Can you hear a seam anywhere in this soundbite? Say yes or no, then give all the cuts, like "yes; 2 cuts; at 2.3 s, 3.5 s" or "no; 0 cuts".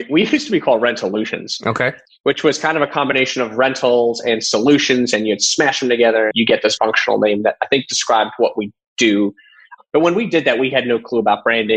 yes; 2 cuts; at 6.3 s, 6.8 s